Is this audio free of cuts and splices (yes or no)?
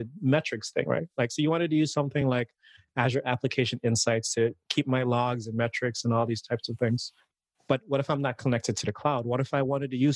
yes